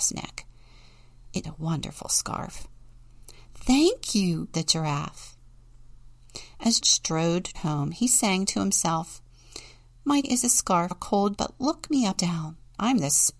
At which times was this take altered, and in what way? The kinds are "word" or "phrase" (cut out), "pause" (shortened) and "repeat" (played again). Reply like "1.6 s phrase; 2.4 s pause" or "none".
1.4 s word; 4.5 s word; 6.8 s word; 7.5 s word; 10.2 s word; 10.9 s word; 11.4 s word; 12.2 s word